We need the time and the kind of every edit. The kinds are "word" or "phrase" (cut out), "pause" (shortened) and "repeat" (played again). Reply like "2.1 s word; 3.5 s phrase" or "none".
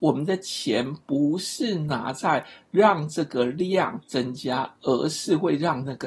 4.1 s pause